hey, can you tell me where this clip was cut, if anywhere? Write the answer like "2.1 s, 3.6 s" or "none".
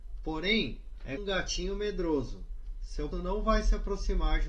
1.2 s, 3.1 s